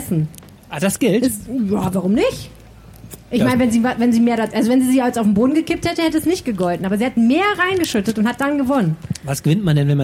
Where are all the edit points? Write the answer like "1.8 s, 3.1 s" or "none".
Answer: none